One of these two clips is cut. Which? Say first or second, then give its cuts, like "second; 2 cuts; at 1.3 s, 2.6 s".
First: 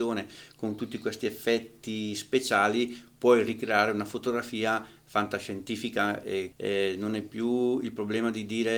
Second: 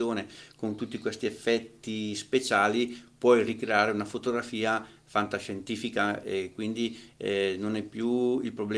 first; 1 cut; at 6.5 s